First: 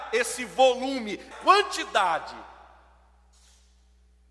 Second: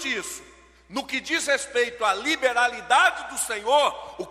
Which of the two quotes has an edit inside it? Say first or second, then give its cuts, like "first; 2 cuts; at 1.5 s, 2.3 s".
first; 1 cut; at 1.3 s